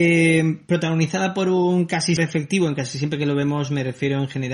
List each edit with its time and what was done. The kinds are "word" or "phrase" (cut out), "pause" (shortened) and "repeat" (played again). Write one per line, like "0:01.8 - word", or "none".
0:02.2 - word